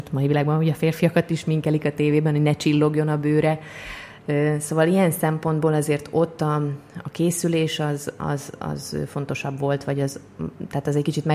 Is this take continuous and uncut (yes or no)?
yes